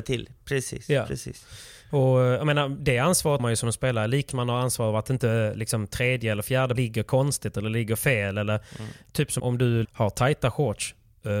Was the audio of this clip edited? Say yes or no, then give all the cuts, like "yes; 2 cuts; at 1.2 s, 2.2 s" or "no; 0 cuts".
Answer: yes; 5 cuts; at 3.4 s, 4.3 s, 6.8 s, 9.4 s, 9.8 s